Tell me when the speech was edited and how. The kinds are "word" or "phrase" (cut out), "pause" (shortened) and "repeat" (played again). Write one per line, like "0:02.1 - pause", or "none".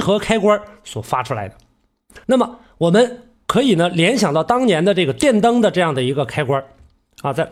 0:02.2 - pause